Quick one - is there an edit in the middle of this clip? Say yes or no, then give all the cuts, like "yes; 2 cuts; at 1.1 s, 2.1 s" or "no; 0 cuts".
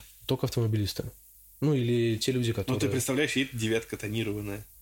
no; 0 cuts